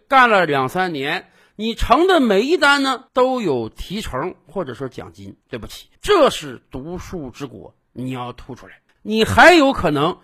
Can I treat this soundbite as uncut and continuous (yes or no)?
no